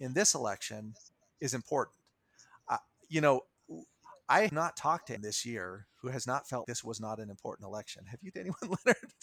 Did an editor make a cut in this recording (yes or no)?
yes